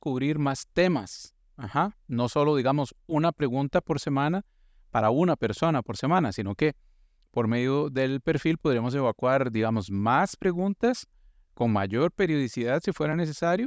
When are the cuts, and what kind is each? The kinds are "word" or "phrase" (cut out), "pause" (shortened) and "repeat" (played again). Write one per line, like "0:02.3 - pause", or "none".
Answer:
none